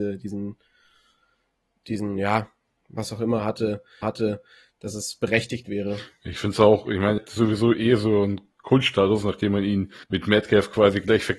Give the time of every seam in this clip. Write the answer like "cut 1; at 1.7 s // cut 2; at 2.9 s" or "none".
cut 1; at 4.0 s // cut 2; at 7.2 s // cut 3; at 10.0 s

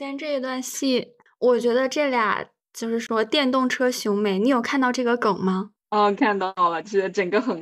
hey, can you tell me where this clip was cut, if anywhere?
cut 1; at 1.3 s

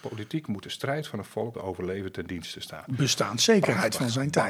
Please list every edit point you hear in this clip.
cut 1; at 1.5 s

